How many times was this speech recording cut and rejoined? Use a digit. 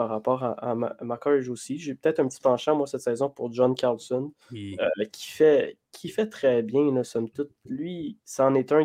1